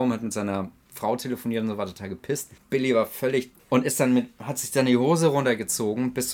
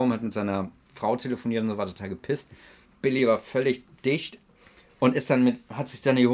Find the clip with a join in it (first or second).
first